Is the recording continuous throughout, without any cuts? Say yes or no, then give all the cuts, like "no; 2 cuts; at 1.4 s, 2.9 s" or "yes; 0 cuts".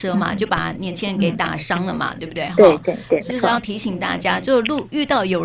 no; 1 cut; at 3.3 s